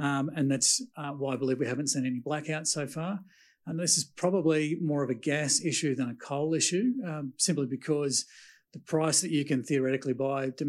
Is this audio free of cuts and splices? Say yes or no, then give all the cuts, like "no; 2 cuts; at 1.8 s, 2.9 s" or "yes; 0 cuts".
yes; 0 cuts